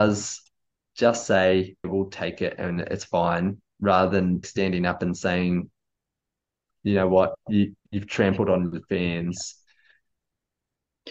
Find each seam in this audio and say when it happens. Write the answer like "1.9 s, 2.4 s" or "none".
1.8 s, 4.4 s, 7.8 s